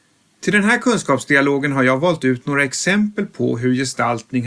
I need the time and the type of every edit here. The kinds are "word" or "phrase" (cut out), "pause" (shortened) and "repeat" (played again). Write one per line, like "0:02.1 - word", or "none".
none